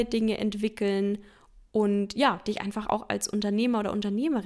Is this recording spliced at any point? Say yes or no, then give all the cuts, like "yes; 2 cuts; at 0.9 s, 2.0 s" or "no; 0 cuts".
no; 0 cuts